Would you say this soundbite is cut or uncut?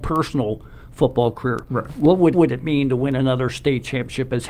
cut